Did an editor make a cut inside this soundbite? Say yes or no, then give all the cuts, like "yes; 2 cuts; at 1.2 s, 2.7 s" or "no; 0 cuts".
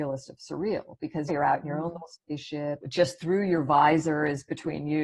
yes; 2 cuts; at 1.3 s, 2.8 s